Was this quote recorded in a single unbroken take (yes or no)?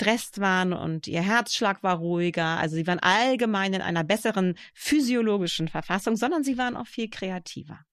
yes